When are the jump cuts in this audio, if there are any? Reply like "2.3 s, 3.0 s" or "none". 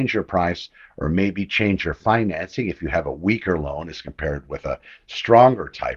none